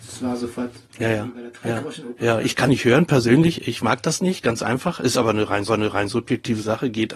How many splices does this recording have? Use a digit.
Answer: 2